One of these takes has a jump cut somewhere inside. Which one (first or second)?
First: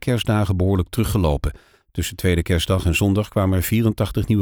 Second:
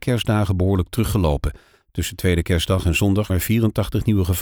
second